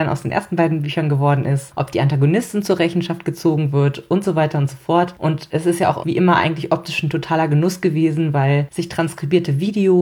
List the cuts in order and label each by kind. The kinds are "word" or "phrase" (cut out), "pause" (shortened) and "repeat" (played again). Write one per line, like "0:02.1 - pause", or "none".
none